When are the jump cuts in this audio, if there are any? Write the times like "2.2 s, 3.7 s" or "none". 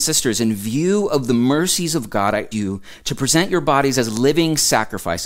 2.5 s